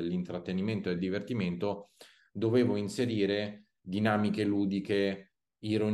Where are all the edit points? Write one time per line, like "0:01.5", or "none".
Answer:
0:01.0